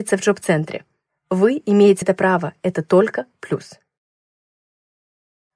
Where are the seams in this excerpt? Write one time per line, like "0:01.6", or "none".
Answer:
0:01.1
0:02.0